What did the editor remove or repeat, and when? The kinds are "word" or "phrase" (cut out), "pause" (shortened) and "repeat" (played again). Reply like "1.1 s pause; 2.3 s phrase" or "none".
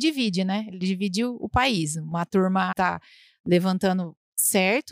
2.7 s phrase